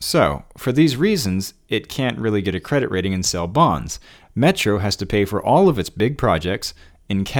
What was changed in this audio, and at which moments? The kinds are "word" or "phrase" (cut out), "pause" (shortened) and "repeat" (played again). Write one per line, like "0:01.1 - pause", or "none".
none